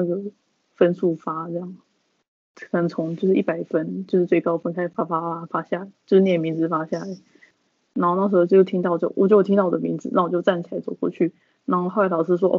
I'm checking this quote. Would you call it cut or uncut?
uncut